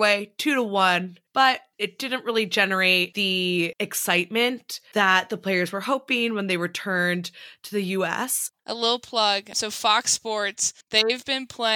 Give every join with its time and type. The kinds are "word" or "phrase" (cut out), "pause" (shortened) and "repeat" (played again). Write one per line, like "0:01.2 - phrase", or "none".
0:01.3 - pause
0:08.6 - pause
0:10.8 - pause